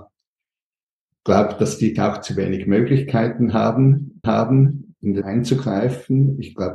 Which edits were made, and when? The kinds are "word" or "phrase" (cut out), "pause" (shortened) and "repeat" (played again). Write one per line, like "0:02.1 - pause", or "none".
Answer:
0:02.0 - word
0:04.2 - repeat
0:05.2 - word